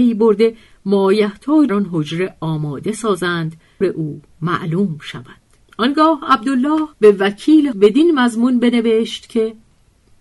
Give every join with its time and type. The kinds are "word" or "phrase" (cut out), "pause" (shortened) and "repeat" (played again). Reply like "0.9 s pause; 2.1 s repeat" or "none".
1.7 s phrase; 3.8 s phrase; 5.6 s pause; 6.9 s pause; 7.7 s word